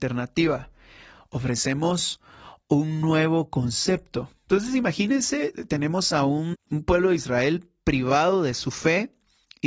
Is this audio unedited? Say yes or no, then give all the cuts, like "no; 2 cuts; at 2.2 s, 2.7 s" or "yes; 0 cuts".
no; 1 cut; at 6.5 s